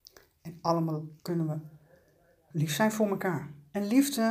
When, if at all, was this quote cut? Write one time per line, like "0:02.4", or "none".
0:01.2
0:02.5